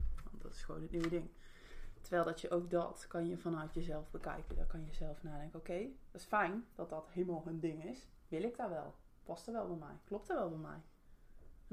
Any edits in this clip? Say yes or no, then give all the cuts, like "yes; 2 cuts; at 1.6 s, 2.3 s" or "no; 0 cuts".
yes; 2 cuts; at 6.1 s, 8.2 s